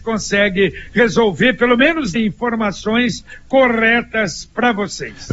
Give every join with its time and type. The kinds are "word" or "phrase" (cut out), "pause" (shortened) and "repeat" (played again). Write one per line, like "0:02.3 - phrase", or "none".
0:02.2 - word